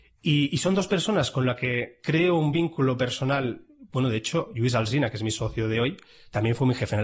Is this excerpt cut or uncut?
uncut